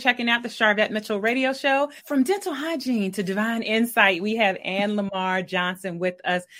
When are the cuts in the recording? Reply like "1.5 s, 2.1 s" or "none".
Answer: 2.0 s